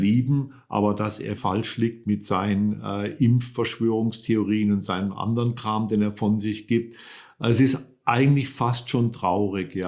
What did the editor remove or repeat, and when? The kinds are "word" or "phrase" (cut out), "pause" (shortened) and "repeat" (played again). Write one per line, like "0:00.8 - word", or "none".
0:01.4 - word